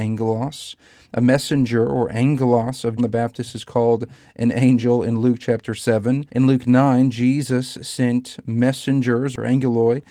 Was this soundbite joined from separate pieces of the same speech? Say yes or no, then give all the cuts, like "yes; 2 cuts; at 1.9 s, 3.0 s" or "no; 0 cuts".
yes; 2 cuts; at 3.0 s, 6.3 s